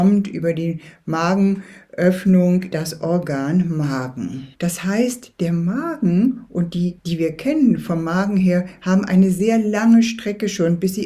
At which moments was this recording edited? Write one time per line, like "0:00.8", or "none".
0:02.7
0:04.5
0:07.0